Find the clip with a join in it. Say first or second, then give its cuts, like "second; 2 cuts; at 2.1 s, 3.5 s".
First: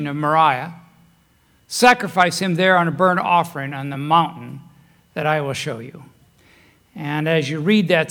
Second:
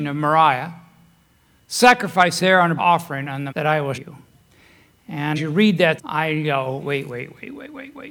second; 7 cuts; at 2.4 s, 2.8 s, 3.5 s, 3.9 s, 5.4 s, 6.0 s, 6.8 s